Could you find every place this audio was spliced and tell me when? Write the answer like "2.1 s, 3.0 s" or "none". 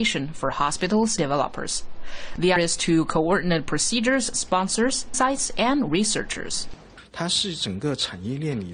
1.2 s, 2.6 s, 4.3 s, 5.1 s